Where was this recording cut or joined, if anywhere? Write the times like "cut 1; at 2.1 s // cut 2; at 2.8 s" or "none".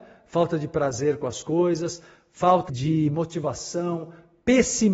cut 1; at 2.7 s